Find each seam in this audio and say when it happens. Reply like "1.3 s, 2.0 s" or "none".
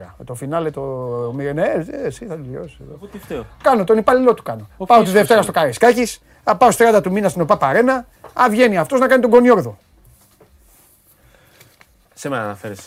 none